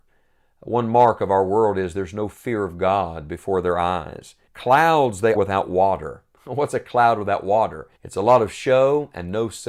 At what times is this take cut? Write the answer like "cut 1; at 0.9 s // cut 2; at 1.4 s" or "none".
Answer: cut 1; at 4.5 s // cut 2; at 5.3 s // cut 3; at 8.0 s